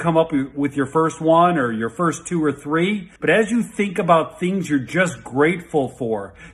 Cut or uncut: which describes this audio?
cut